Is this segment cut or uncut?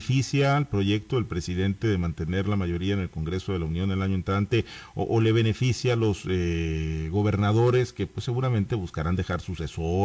uncut